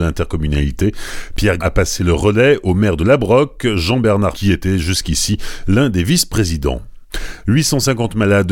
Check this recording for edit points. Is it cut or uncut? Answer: cut